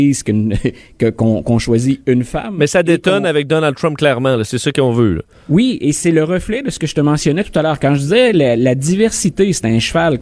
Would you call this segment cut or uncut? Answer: uncut